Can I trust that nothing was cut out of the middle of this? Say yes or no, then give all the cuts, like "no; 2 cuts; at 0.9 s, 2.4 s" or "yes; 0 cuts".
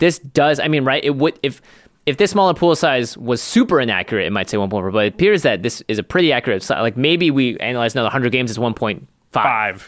yes; 0 cuts